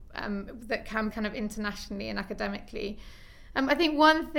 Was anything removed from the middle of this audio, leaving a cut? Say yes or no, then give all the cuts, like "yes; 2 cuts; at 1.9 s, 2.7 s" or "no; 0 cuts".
yes; 1 cut; at 1.1 s